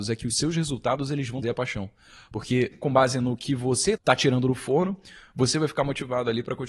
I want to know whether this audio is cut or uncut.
cut